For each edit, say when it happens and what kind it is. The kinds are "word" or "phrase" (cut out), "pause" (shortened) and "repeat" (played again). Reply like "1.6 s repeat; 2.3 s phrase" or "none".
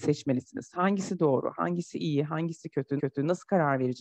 1.9 s phrase; 3.0 s repeat